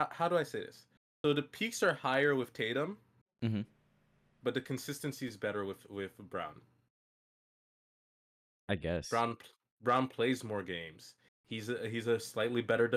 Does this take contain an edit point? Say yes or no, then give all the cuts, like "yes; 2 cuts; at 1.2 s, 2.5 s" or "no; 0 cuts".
no; 0 cuts